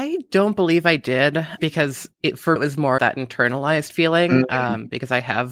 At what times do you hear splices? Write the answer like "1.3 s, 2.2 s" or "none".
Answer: 1.6 s, 2.6 s, 3.0 s